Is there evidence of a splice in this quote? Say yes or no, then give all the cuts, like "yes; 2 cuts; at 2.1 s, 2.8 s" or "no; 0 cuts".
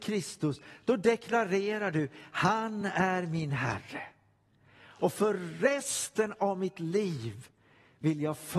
no; 0 cuts